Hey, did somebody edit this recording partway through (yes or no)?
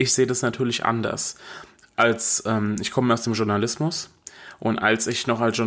no